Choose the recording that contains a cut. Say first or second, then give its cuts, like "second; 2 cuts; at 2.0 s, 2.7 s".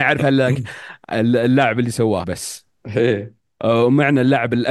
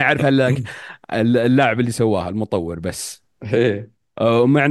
first; 1 cut; at 2.2 s